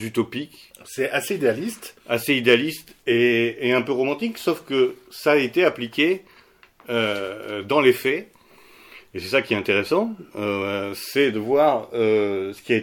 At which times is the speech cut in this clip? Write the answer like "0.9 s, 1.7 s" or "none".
none